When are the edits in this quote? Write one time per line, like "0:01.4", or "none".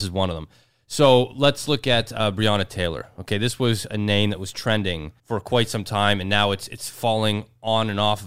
0:05.2